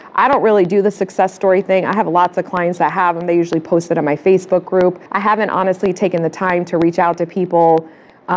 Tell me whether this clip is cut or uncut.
cut